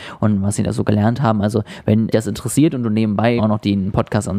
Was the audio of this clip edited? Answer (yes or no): yes